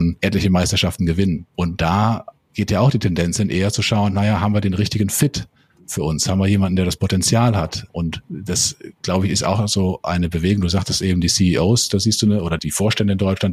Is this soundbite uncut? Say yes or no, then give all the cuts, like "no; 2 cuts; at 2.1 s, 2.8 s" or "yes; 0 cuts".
yes; 0 cuts